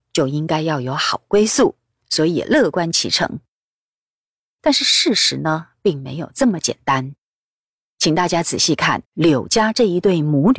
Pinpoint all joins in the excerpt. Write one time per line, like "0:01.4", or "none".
0:09.1